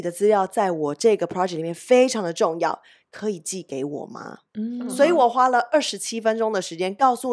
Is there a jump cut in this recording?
no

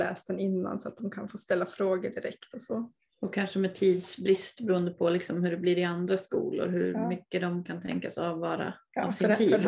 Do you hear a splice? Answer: no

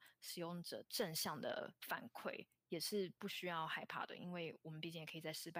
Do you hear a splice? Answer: no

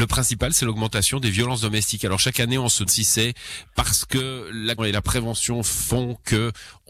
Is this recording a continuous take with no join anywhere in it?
no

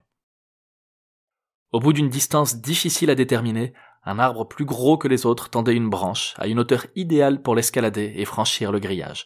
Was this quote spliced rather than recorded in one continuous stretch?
no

